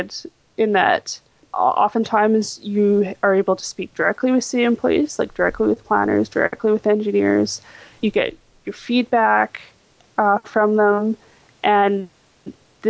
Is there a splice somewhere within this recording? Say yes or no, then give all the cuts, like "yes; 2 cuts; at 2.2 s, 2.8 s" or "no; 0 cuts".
no; 0 cuts